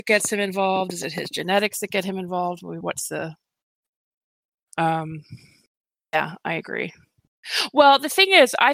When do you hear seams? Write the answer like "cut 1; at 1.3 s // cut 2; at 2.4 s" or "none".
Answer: cut 1; at 5.9 s